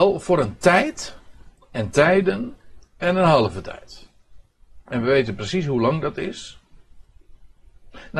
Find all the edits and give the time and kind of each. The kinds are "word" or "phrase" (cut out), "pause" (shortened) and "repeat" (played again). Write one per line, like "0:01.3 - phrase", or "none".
0:04.8 - pause